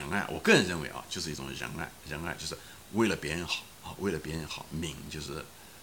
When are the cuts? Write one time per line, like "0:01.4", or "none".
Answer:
0:03.7

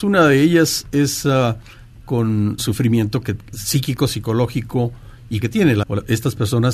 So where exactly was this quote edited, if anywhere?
0:02.0
0:02.6
0:03.5
0:05.4
0:05.8

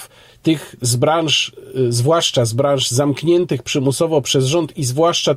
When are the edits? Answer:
none

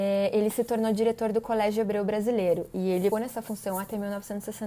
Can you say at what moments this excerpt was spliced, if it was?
0:03.1

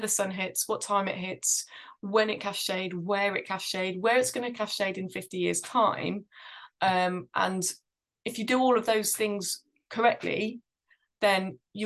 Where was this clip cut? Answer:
none

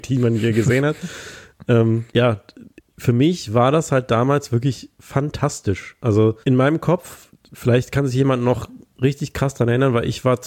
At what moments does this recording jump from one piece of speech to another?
0:02.1
0:06.4

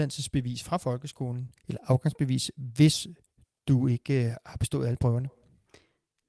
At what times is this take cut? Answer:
0:01.6

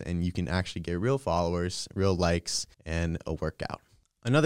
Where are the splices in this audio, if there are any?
0:02.7

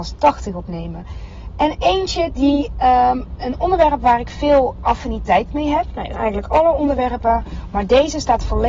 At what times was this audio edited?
0:03.4
0:06.1

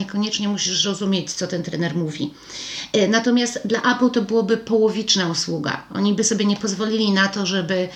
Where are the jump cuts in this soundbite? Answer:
none

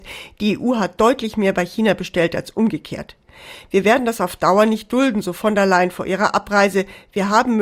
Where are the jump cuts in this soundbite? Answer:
none

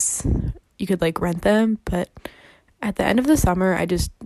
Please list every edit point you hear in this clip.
none

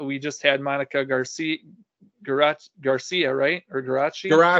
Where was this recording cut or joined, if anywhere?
none

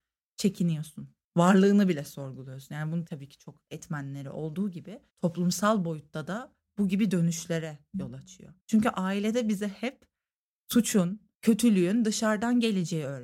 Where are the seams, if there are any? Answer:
0:01.2
0:03.1
0:05.1
0:08.6
0:11.3

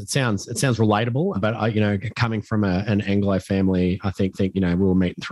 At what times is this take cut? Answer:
0:01.3
0:04.3

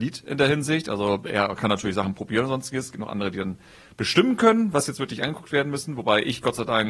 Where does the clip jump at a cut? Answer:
none

